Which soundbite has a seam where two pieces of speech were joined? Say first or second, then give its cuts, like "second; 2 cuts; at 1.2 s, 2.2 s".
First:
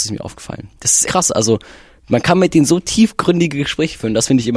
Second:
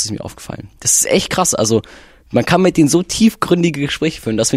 first; 1 cut; at 1.0 s